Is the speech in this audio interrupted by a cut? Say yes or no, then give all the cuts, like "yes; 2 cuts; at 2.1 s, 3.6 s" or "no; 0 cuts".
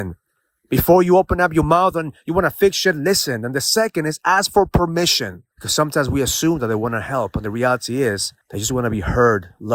yes; 2 cuts; at 5.5 s, 8.4 s